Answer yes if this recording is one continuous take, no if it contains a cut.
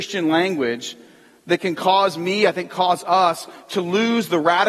yes